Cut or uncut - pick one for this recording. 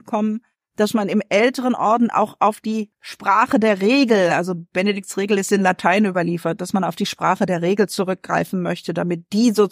uncut